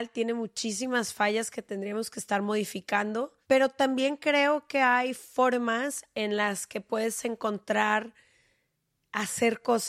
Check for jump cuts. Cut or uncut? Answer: uncut